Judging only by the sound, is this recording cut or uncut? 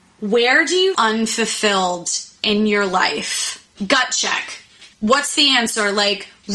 cut